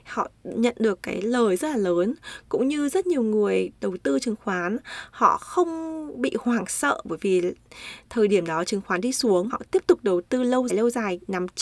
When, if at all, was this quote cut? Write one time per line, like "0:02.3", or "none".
0:09.5
0:10.7